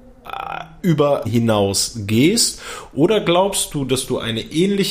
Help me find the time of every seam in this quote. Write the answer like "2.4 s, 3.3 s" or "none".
1.2 s